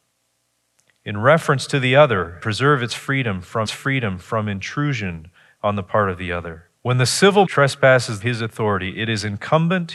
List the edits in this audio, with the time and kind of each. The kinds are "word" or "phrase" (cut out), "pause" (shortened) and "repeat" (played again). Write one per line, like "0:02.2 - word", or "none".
0:02.4 - word
0:03.7 - repeat
0:06.7 - pause
0:07.5 - word
0:08.2 - phrase